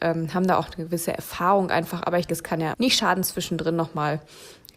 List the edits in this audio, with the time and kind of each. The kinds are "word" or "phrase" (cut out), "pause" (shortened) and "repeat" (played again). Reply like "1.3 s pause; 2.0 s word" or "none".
2.3 s word; 2.7 s word

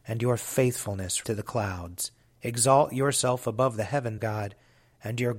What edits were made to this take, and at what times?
1.2 s word; 2.2 s pause; 4.2 s word

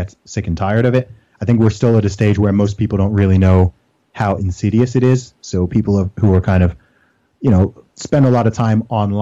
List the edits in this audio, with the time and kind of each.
none

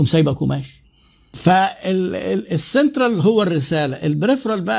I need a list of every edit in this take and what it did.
none

